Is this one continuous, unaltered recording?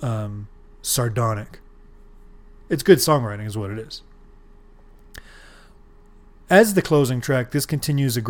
yes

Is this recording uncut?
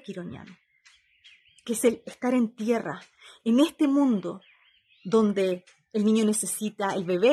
yes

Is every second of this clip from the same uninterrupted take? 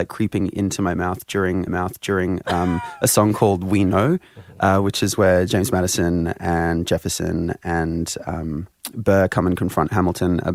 no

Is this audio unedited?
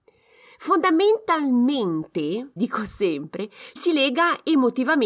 no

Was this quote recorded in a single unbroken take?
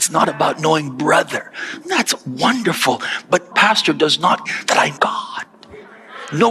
no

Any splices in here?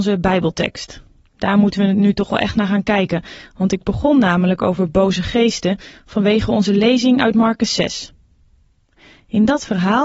no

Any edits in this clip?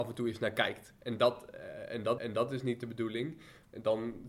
yes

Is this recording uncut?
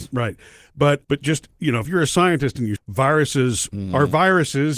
no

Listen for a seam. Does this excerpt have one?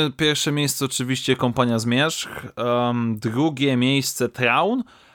no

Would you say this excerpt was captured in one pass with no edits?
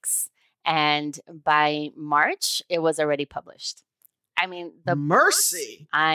yes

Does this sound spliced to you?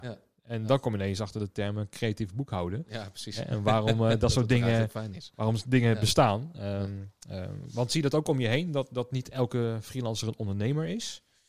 no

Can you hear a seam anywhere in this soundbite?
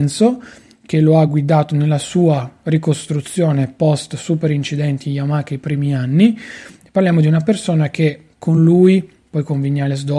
no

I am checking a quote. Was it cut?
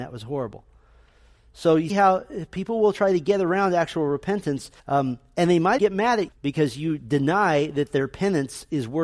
yes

